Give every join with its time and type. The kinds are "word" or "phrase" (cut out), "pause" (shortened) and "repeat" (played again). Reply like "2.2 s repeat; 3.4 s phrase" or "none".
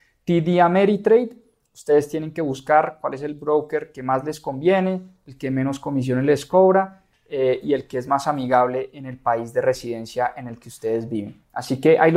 none